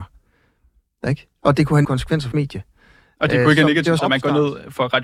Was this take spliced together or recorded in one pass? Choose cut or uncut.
cut